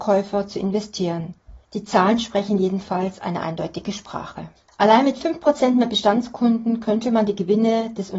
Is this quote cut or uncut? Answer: cut